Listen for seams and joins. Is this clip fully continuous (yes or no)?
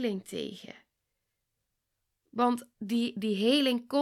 no